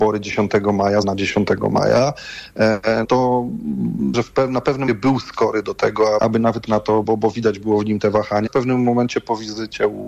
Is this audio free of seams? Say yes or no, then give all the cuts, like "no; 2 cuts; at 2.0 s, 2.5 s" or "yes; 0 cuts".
no; 8 cuts; at 1.0 s, 3.0 s, 4.1 s, 4.9 s, 6.2 s, 6.7 s, 7.0 s, 8.5 s